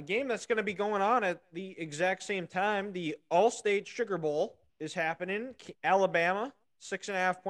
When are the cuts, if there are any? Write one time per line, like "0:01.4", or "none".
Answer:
0:04.7